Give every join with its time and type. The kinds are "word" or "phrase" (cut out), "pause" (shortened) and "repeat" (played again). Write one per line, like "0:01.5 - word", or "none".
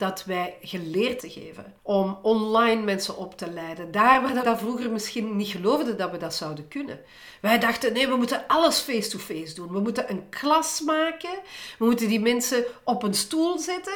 0:01.2 - phrase
0:01.8 - pause
0:04.4 - word